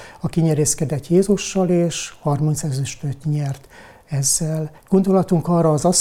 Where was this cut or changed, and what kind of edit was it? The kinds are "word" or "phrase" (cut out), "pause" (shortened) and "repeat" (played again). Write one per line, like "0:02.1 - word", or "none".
0:04.8 - pause